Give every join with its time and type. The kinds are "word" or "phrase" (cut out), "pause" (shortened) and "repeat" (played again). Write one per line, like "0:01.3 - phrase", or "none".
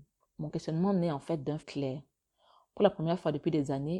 0:01.6 - word